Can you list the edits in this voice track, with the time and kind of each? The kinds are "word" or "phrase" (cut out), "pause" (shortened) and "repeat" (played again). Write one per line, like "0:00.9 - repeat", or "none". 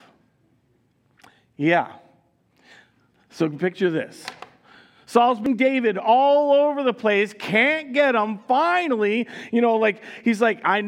none